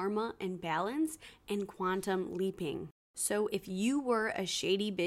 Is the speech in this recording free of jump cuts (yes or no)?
yes